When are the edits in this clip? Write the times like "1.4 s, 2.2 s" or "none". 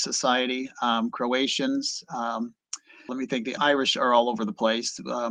3.1 s, 3.6 s